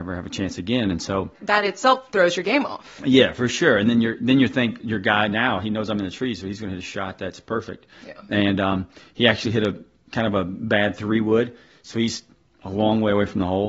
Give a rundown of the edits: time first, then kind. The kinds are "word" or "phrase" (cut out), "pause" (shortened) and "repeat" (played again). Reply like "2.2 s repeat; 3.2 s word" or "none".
none